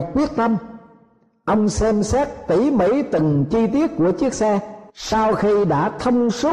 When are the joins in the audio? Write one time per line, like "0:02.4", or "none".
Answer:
0:04.9